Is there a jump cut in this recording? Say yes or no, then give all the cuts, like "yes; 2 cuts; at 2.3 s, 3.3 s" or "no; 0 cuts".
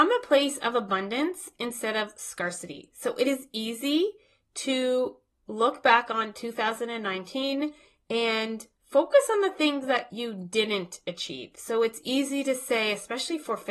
no; 0 cuts